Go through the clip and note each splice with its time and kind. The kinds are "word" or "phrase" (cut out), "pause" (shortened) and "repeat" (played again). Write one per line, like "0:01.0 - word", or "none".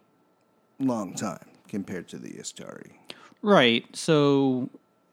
none